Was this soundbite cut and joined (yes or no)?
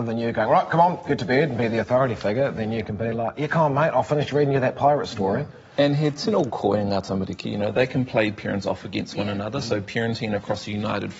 no